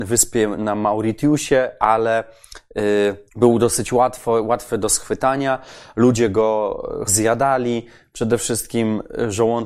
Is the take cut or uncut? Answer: cut